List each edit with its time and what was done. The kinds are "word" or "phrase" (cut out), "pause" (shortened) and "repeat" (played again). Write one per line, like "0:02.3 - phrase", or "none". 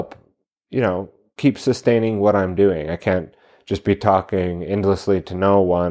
none